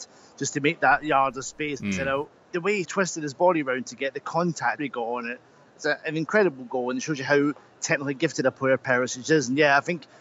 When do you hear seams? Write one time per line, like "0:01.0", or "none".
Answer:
0:02.4
0:02.8
0:04.8